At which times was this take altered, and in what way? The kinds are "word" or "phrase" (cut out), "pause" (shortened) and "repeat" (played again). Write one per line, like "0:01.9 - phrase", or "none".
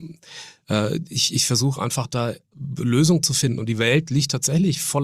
none